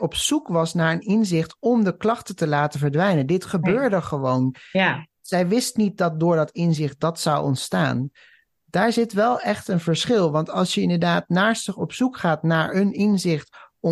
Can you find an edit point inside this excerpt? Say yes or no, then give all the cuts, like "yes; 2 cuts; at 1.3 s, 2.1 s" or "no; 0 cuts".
no; 0 cuts